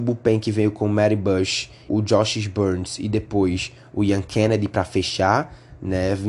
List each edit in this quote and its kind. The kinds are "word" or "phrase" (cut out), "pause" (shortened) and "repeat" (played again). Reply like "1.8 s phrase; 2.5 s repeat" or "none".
1.9 s phrase